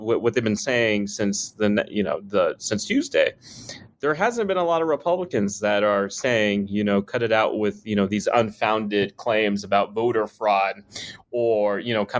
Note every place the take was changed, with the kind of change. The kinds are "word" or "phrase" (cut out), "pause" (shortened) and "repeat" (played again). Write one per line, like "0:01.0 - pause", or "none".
none

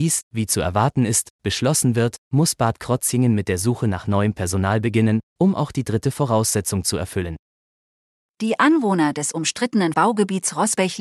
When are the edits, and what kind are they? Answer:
0:09.9 - word

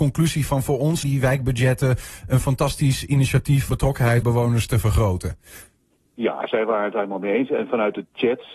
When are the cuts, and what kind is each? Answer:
0:01.0 - word
0:03.7 - word
0:04.2 - word

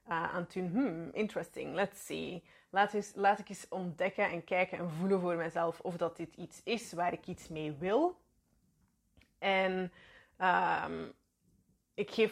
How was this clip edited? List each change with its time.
none

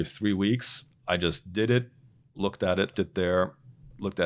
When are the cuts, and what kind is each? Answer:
0:02.9 - word

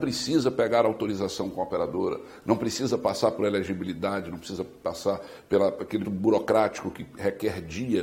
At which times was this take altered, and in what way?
0:06.0 - word

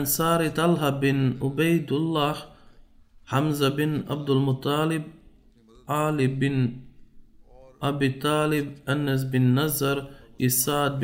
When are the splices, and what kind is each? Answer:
none

